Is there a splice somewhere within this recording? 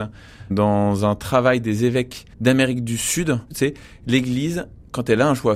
yes; 2 cuts; at 2.3 s, 3.5 s

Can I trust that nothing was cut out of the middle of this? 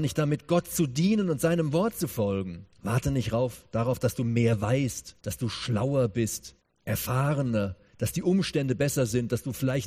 no; 3 cuts; at 2.7 s, 5.2 s, 6.6 s

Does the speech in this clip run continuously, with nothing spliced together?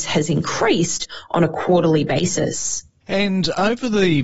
yes; 0 cuts

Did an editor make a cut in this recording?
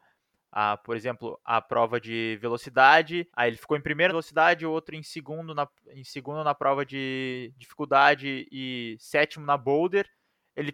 yes; 2 cuts; at 3.3 s, 4.1 s

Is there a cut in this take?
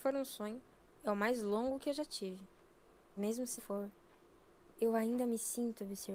yes; 2 cuts; at 3.2 s, 3.6 s

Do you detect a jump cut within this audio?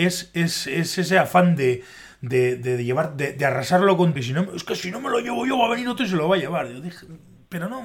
yes; 1 cut; at 4.2 s

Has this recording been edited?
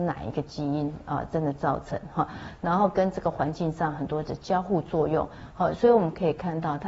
no; 0 cuts

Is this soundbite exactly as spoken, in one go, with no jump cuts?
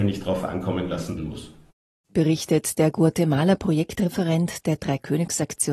no; 1 cut; at 1.2 s

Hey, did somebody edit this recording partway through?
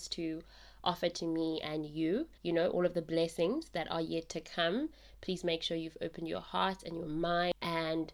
yes; 1 cut; at 2.4 s

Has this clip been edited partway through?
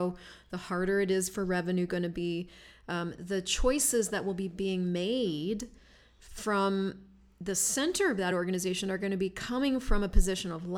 no; 0 cuts

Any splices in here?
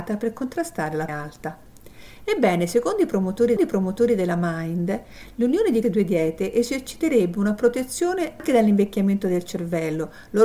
yes; 3 cuts; at 1.1 s, 3.6 s, 5.8 s

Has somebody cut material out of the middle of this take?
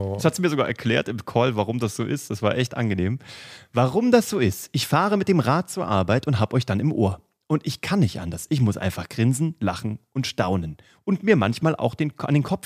no; 0 cuts

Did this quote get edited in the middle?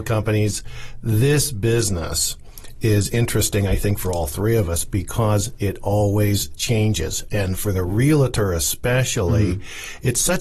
no; 0 cuts

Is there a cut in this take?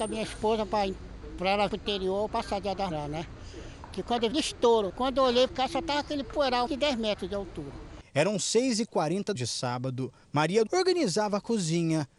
yes; 8 cuts; at 1.7 s, 2.3 s, 2.9 s, 4.3 s, 5.5 s, 6.7 s, 9.4 s, 10.7 s

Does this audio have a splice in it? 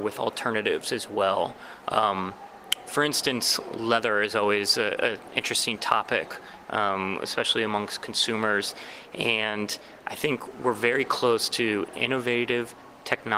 no; 0 cuts

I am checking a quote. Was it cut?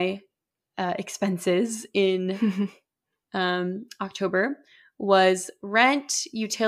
no; 0 cuts

